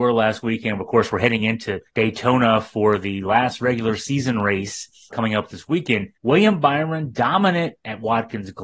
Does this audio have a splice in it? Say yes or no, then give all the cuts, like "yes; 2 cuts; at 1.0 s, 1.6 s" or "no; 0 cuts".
yes; 3 cuts; at 1.9 s, 5.1 s, 6.1 s